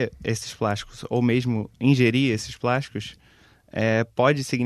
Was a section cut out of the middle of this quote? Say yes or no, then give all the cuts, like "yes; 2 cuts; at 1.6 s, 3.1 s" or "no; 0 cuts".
no; 0 cuts